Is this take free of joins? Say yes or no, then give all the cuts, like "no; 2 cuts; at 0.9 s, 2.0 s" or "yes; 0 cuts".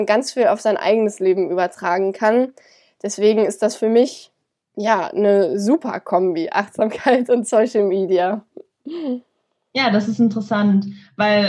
yes; 0 cuts